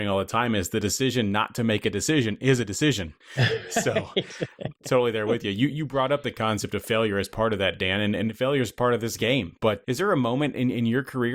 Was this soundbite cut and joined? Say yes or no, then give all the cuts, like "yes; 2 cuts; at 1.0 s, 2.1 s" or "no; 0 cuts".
yes; 2 cuts; at 3.2 s, 9.8 s